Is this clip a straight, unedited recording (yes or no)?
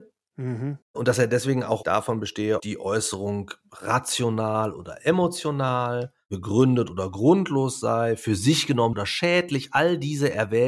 no